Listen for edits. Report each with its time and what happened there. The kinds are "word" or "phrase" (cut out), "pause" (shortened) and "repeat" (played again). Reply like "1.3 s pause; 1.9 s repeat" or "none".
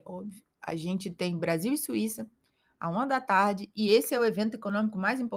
none